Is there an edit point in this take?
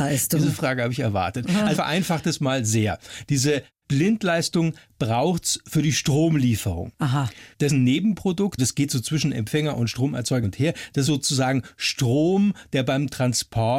yes; 5 cuts; at 1.7 s, 7.7 s, 8.6 s, 10.4 s, 11.1 s

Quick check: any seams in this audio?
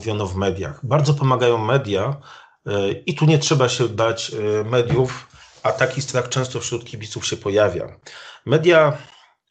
no; 0 cuts

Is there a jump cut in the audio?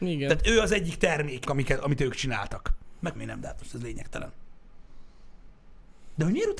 yes; 2 cuts; at 1.4 s, 3.1 s

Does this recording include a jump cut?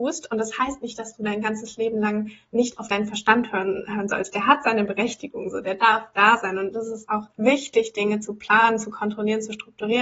yes; 1 cut; at 7.3 s

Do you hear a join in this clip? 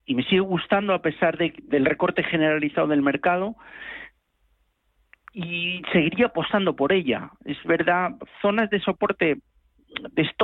no; 0 cuts

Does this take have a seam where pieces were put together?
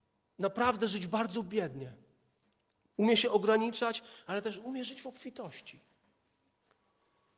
no; 0 cuts

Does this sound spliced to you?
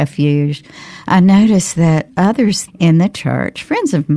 yes; 1 cut; at 2.7 s

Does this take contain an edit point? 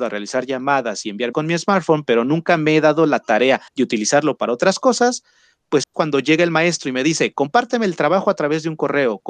yes; 3 cuts; at 1.3 s, 3.7 s, 5.8 s

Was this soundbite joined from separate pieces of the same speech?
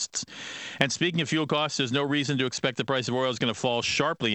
no; 0 cuts

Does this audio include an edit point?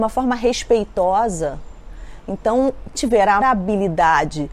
yes; 2 cuts; at 2.9 s, 3.4 s

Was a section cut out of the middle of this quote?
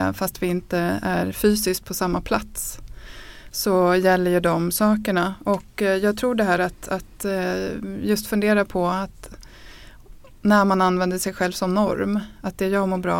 no; 0 cuts

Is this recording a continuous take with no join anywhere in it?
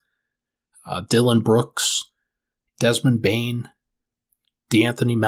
yes; 0 cuts

